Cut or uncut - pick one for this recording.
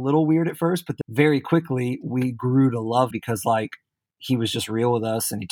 cut